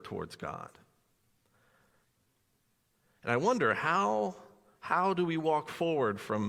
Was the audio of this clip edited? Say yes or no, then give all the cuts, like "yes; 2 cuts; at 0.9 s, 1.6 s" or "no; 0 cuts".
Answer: no; 0 cuts